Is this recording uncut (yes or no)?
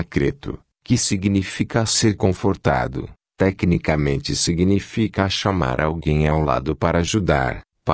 yes